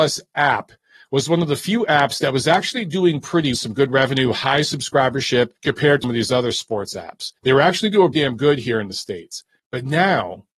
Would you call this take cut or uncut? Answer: cut